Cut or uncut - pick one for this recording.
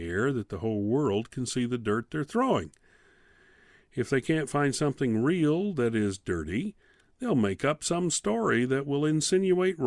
uncut